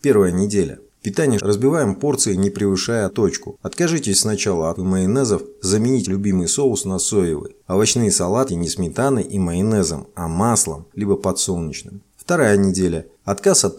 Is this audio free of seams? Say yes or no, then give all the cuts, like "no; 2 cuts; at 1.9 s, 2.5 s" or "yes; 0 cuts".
no; 6 cuts; at 1.4 s, 3.1 s, 4.7 s, 6.0 s, 8.5 s, 10.9 s